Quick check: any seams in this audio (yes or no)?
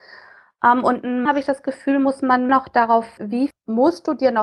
yes